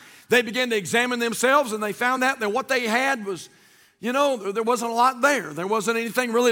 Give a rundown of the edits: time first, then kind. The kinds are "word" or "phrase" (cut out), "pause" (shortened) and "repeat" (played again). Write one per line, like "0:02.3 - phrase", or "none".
none